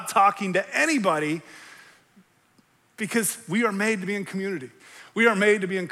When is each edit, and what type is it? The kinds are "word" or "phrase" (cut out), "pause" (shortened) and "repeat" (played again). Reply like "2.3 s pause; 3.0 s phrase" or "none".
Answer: none